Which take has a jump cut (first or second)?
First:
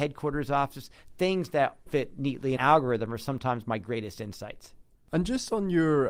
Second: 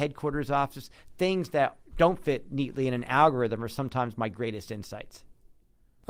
first